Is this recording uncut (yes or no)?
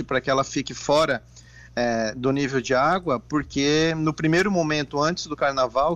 yes